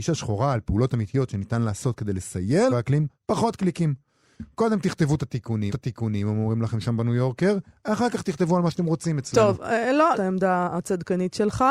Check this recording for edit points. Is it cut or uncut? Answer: cut